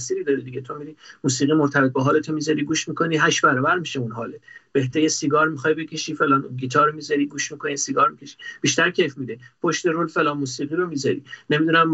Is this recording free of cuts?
yes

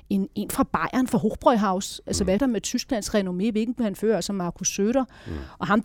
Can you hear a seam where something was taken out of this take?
yes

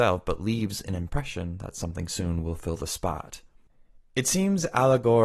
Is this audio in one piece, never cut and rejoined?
yes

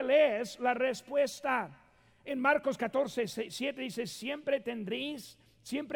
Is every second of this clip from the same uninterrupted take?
yes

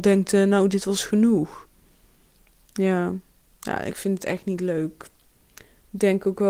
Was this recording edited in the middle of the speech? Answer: no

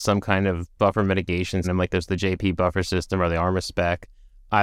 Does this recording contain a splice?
yes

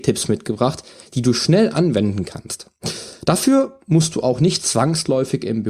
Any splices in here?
no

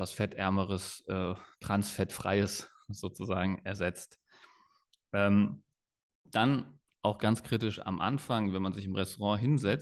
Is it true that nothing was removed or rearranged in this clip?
yes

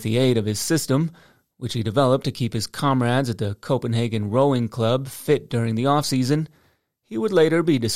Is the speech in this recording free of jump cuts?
yes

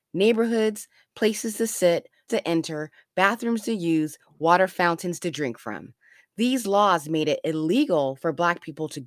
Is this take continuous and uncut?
no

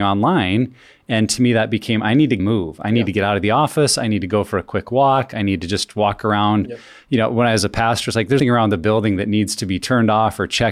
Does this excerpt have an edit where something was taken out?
yes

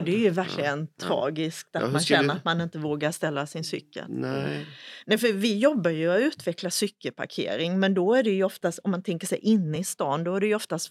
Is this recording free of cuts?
yes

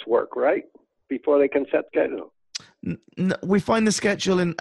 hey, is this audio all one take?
no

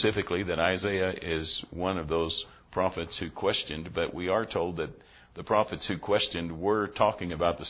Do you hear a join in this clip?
no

